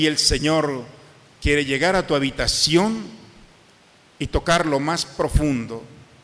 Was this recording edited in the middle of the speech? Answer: no; 0 cuts

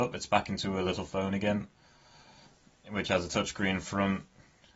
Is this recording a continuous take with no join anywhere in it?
yes; 0 cuts

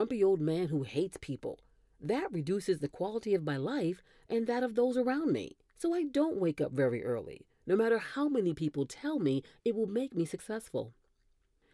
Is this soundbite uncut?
no; 1 cut; at 5.6 s

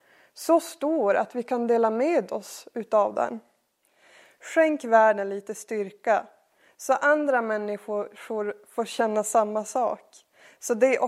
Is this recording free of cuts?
yes; 0 cuts

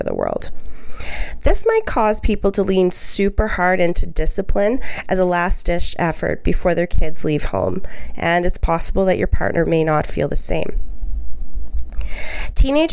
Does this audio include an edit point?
no; 0 cuts

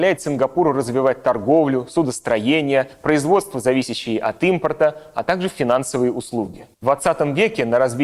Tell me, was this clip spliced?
yes; 2 cuts; at 2.9 s, 6.7 s

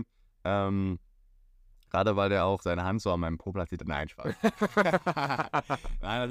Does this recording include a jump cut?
yes; 1 cut; at 2.6 s

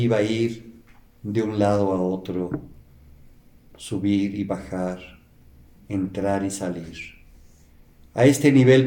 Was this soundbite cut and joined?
no; 0 cuts

